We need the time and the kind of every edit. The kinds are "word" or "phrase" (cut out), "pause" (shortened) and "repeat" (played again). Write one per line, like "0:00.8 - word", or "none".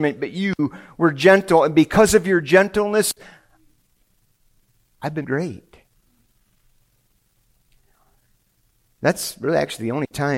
0:05.2 - word